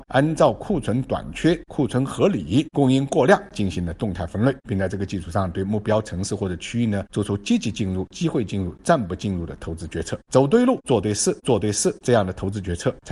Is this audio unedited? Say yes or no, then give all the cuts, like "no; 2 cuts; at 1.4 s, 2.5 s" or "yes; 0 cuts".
no; 1 cut; at 11.4 s